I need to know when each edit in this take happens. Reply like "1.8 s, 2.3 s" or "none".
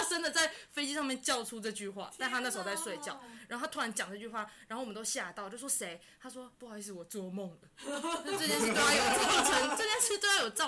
6.5 s